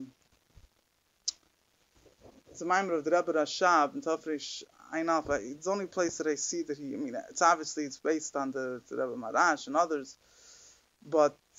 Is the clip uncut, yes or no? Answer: yes